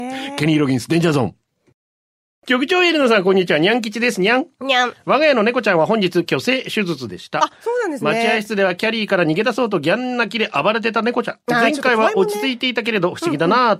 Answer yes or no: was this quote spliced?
no